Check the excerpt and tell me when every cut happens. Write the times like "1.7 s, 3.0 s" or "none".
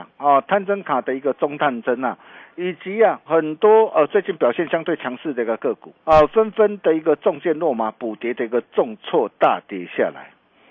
3.3 s, 6.0 s